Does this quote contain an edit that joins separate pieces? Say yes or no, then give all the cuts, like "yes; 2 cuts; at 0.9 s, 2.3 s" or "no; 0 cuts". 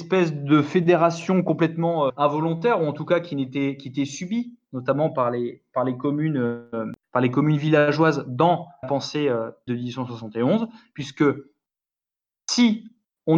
yes; 3 cuts; at 2.1 s, 8.8 s, 9.7 s